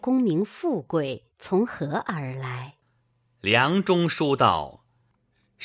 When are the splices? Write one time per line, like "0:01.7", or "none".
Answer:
0:01.3
0:02.8